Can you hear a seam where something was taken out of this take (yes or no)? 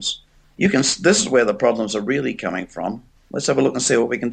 no